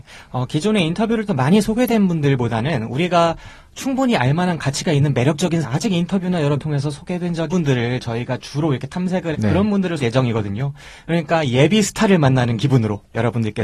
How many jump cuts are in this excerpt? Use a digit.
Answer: 6